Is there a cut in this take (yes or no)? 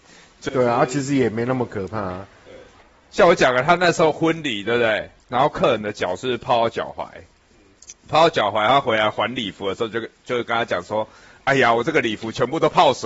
yes